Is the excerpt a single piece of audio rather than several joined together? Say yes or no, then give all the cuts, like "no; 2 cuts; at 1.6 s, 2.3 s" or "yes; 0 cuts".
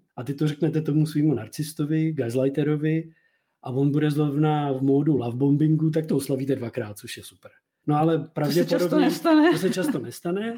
yes; 0 cuts